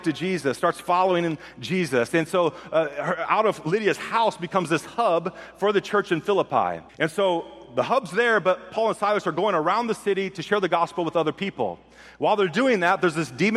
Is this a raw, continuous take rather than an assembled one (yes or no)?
no